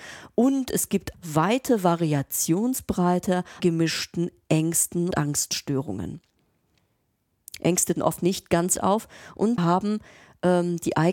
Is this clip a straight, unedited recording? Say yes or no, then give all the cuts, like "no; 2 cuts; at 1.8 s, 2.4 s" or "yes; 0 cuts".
no; 6 cuts; at 1.1 s, 3.6 s, 5.1 s, 8.0 s, 8.8 s, 9.6 s